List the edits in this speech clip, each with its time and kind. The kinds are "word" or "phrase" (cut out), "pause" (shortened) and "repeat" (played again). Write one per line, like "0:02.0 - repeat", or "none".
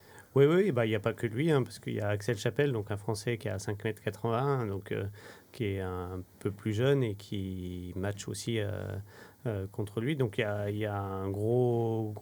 none